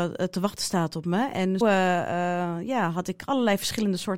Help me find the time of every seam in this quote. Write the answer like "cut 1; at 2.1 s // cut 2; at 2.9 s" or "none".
cut 1; at 1.6 s